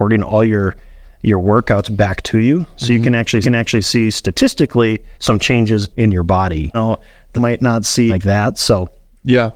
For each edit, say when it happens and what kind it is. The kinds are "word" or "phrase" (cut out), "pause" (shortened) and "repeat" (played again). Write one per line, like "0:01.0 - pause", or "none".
0:03.4 - repeat
0:05.1 - pause
0:05.9 - word
0:06.7 - word
0:07.4 - word
0:08.1 - phrase